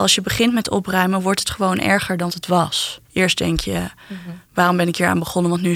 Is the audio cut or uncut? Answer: cut